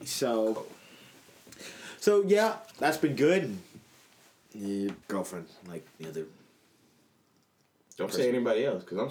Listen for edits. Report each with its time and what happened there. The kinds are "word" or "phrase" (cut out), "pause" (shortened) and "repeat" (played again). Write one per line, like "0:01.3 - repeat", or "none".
0:02.7 - word
0:05.0 - word
0:06.0 - word